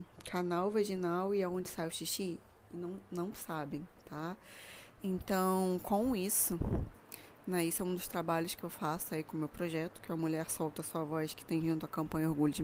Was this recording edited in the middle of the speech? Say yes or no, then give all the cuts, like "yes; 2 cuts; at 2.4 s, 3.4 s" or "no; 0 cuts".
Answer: no; 0 cuts